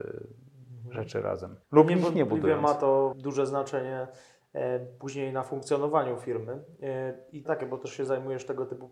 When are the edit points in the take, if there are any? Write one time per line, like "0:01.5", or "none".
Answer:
0:01.6
0:03.1
0:07.4